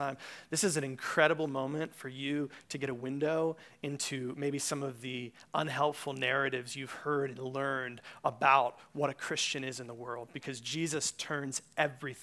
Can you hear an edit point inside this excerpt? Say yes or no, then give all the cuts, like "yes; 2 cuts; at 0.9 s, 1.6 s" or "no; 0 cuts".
no; 0 cuts